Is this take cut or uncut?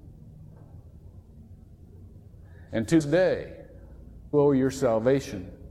cut